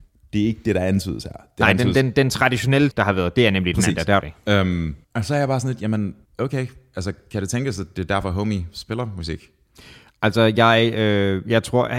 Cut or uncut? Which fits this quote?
cut